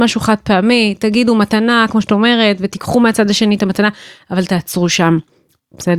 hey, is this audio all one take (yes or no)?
yes